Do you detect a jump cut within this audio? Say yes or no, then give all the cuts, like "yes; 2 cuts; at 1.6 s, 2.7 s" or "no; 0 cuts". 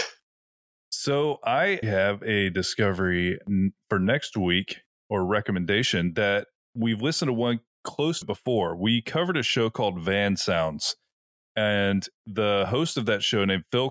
yes; 2 cuts; at 1.8 s, 8.2 s